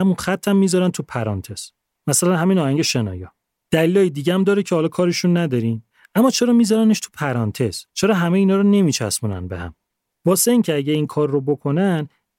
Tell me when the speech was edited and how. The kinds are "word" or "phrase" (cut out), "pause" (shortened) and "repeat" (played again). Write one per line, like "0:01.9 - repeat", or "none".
0:05.9 - pause
0:07.9 - pause